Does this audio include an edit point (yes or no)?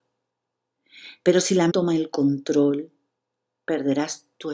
yes